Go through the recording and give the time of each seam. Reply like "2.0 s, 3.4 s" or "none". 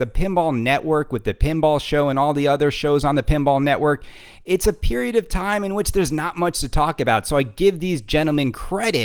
none

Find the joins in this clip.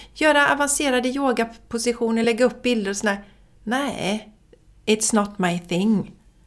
none

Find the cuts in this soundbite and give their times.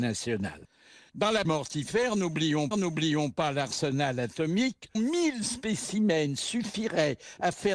1.4 s, 2.7 s, 4.9 s

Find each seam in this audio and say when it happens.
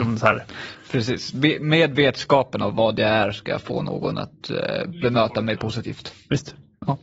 none

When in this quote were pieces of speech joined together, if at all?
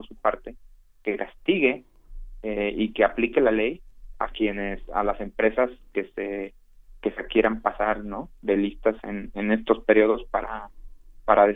none

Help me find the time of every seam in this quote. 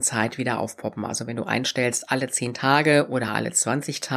none

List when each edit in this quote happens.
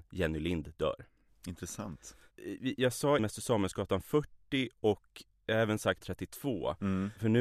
3.2 s, 6.0 s

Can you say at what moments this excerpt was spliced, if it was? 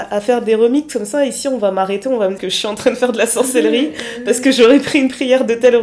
2.4 s

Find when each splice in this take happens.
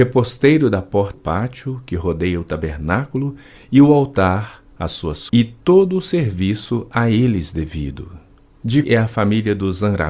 1.1 s, 5.3 s, 8.8 s

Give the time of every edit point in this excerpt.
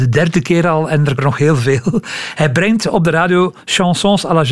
1.2 s

